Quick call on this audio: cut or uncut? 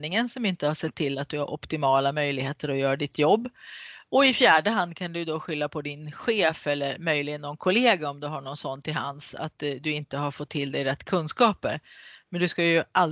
uncut